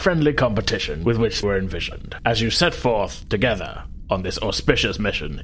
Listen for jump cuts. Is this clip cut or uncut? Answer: cut